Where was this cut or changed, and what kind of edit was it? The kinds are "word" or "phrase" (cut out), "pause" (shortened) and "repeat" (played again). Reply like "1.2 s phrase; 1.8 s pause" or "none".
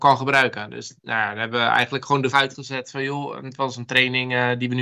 1.0 s pause; 2.3 s word